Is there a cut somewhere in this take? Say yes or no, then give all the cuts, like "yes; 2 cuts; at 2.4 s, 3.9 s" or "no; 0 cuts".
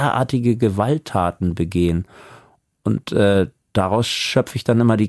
no; 0 cuts